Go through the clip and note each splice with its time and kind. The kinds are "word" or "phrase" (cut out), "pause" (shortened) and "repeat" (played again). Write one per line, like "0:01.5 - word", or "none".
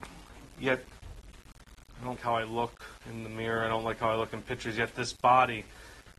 0:02.2 - word